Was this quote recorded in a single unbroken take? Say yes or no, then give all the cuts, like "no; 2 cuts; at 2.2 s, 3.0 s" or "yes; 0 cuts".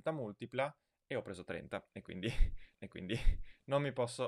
no; 1 cut; at 2.7 s